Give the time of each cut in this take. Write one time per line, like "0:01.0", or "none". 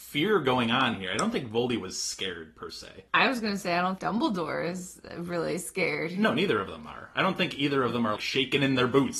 0:03.1
0:04.0
0:08.2